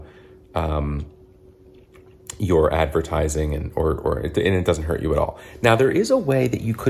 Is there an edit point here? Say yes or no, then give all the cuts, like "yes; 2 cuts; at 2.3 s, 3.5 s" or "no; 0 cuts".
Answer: no; 0 cuts